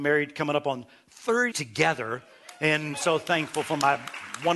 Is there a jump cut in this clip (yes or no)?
yes